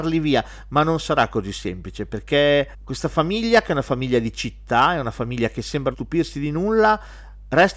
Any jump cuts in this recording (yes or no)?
yes